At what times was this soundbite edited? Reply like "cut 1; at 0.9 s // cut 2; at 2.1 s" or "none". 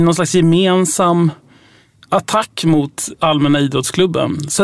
cut 1; at 2.0 s